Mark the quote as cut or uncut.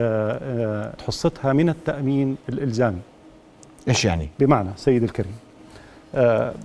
cut